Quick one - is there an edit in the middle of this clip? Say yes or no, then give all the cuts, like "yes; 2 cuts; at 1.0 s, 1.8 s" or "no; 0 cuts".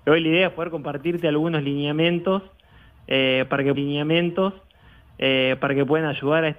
yes; 1 cut; at 3.7 s